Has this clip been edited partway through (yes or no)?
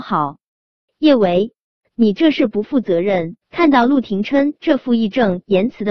yes